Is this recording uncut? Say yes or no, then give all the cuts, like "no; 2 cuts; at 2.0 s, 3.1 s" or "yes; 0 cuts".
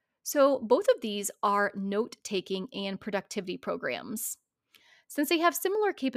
yes; 0 cuts